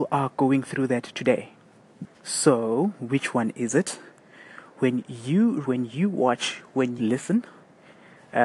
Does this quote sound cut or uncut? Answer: cut